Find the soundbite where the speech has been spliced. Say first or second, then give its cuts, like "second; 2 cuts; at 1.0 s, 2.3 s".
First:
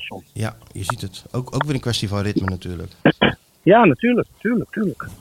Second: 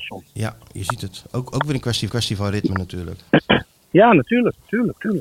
second; 1 cut; at 2.1 s